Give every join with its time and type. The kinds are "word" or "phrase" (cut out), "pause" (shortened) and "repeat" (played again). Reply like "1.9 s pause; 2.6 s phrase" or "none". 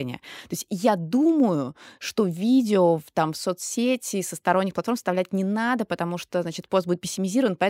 none